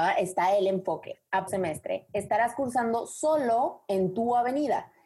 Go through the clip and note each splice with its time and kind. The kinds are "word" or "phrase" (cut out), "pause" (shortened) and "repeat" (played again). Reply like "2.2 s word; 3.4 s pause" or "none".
1.5 s phrase